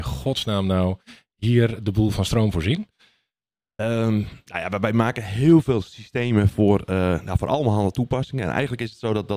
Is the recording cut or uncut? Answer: uncut